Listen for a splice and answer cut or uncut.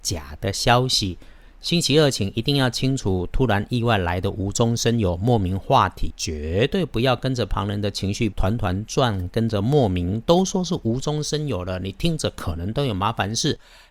cut